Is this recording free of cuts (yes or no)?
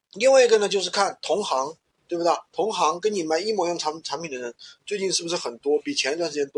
no